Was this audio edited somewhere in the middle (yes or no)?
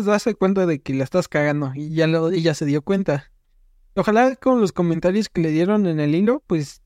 no